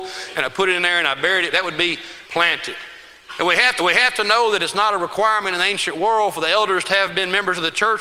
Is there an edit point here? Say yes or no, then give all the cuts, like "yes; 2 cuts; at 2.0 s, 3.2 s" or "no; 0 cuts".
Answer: yes; 3 cuts; at 1.5 s, 2.2 s, 3.8 s